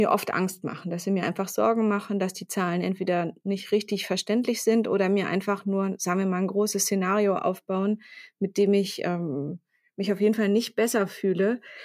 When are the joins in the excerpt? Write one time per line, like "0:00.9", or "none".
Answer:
none